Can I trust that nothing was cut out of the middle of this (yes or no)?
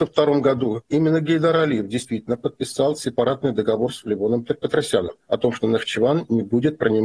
no